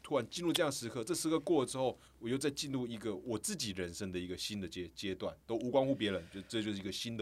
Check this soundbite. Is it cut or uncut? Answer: cut